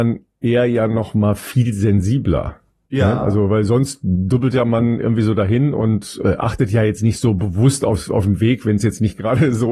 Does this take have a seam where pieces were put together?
yes; 1 cut; at 2.7 s

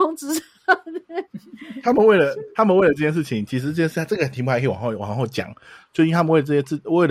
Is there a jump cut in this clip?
no; 0 cuts

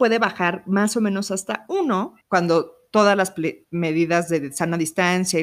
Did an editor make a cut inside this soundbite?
yes; 2 cuts; at 2.2 s, 3.6 s

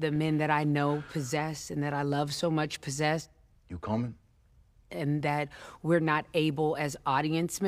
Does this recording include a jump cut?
no; 0 cuts

